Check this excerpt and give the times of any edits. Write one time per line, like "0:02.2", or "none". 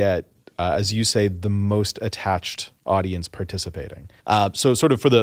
0:02.8
0:04.2